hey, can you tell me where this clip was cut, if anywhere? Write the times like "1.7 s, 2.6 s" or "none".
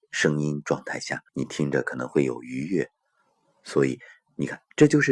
1.3 s

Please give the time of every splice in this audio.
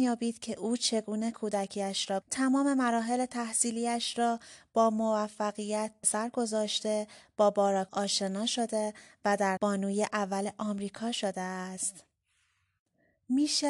2.2 s, 6.0 s, 7.9 s, 9.6 s

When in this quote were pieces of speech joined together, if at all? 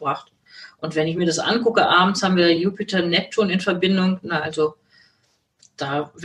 none

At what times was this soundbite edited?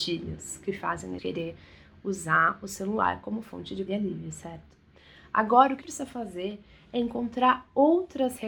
1.2 s, 3.9 s, 5.8 s

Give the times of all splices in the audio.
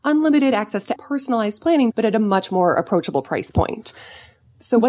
1.0 s, 1.9 s

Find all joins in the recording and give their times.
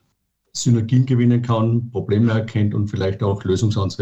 none

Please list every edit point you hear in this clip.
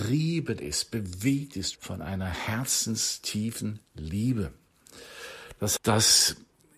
1.8 s, 5.8 s

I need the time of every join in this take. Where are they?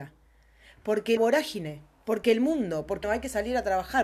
1.2 s, 3.0 s

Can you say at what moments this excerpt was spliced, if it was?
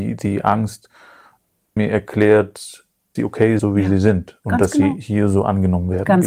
1.8 s, 3.2 s, 3.6 s

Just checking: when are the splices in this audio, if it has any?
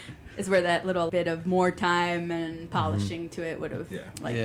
1.1 s

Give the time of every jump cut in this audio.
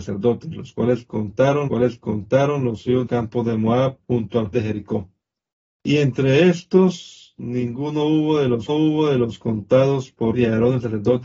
1.7 s, 3.1 s, 4.0 s, 4.5 s, 5.5 s, 8.7 s, 10.3 s

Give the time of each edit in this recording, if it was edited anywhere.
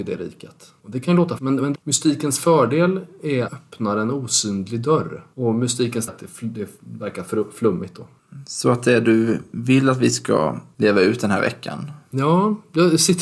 1.4 s, 1.7 s, 3.5 s, 6.1 s

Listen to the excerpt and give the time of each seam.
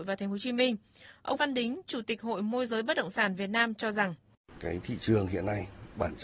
1.4 s

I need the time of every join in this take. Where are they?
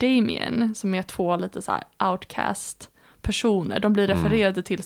none

